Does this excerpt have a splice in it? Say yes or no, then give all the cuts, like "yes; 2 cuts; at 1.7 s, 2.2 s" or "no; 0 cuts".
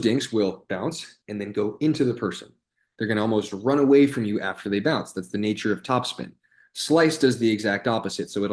yes; 1 cut; at 1.2 s